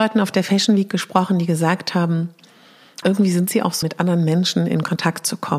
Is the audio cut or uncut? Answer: cut